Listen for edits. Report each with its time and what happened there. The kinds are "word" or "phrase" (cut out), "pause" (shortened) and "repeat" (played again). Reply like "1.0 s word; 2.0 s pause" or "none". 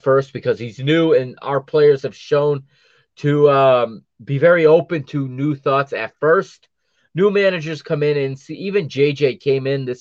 none

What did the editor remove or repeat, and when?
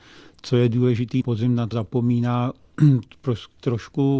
1.2 s word; 1.7 s word

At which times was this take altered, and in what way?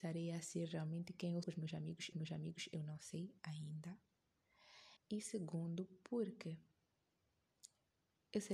1.4 s word; 2.1 s repeat; 5.0 s pause

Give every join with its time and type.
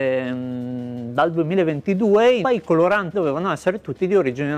2.4 s word; 3.1 s word

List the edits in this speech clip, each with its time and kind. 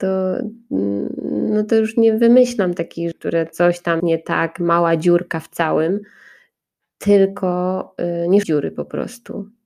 3.1 s word; 4.0 s word; 8.4 s phrase

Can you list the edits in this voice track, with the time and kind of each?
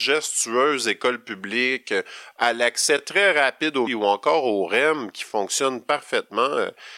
3.9 s phrase

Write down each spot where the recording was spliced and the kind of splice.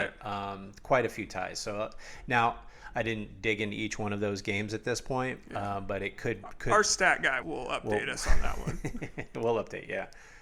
7.4 s word

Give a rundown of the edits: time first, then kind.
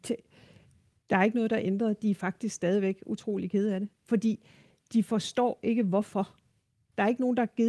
none

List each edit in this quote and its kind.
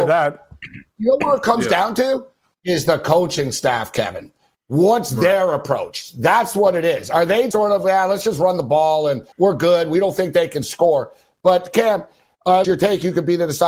7.5 s word; 9.3 s pause; 12.6 s phrase

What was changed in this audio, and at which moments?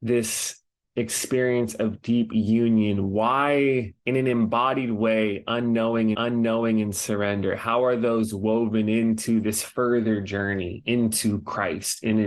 4.0 s pause; 6.1 s repeat

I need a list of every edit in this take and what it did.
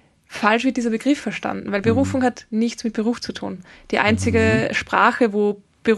none

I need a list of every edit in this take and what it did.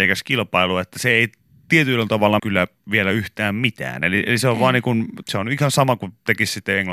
2.4 s word; 5.2 s word

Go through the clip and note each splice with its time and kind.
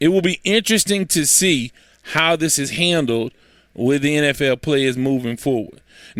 none

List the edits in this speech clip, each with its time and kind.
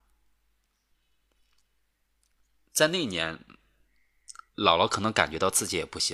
4.5 s pause

